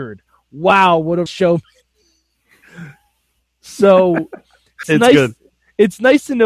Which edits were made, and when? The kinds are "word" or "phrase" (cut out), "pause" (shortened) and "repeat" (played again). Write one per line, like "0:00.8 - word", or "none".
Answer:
0:01.3 - word
0:04.8 - word